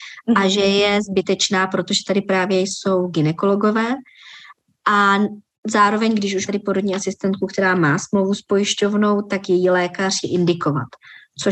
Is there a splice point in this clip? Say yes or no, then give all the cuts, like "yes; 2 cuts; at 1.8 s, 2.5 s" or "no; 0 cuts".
yes; 2 cuts; at 6.5 s, 10.2 s